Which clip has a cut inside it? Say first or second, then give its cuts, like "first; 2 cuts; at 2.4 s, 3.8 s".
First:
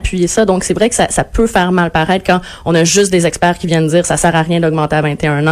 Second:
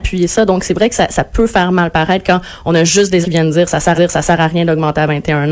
second; 2 cuts; at 3.2 s, 3.9 s